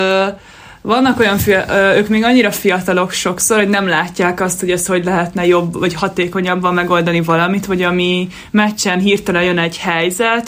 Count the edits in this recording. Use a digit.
0